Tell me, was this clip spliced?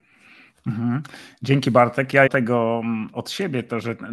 yes; 1 cut; at 2.3 s

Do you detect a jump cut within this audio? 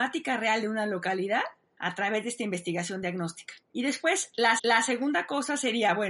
yes; 2 cuts; at 3.6 s, 4.6 s

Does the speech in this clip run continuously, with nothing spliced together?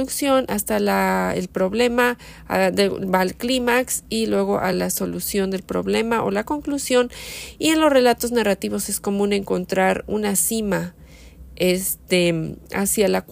yes; 0 cuts

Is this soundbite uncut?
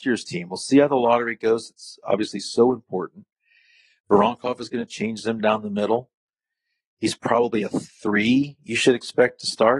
yes; 0 cuts

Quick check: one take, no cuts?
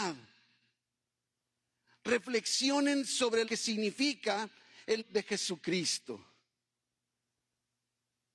no; 2 cuts; at 3.4 s, 5.0 s

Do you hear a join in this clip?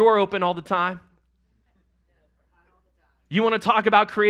no; 0 cuts

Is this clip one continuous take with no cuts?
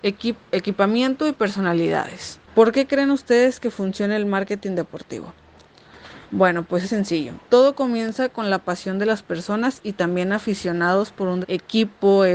no; 5 cuts; at 2.5 s, 6.2 s, 6.8 s, 7.4 s, 11.4 s

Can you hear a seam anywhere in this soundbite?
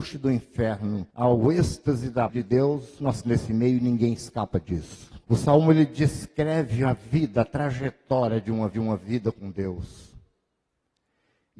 yes; 5 cuts; at 1.1 s, 2.3 s, 3.2 s, 5.2 s, 8.7 s

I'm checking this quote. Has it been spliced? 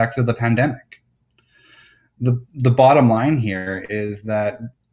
no; 0 cuts

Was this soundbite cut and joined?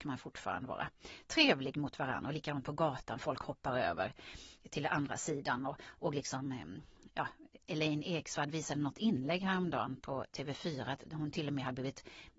no; 0 cuts

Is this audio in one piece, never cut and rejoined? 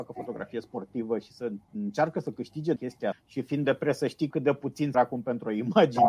no; 6 cuts; at 1.6 s, 2.8 s, 3.1 s, 3.6 s, 4.3 s, 4.9 s

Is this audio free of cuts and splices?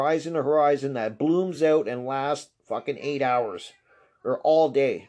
yes; 0 cuts

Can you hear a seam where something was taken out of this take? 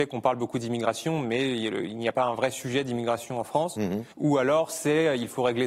yes; 1 cut; at 4.1 s

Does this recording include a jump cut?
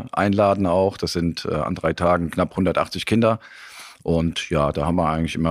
no; 0 cuts

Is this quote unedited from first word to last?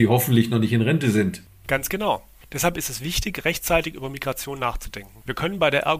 yes; 0 cuts

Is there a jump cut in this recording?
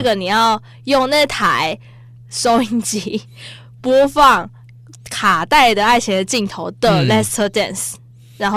no; 0 cuts

